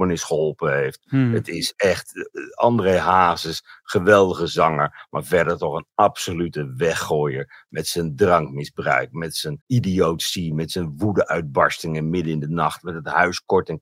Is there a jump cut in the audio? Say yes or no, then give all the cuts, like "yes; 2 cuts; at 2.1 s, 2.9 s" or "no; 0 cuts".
yes; 1 cut; at 9.6 s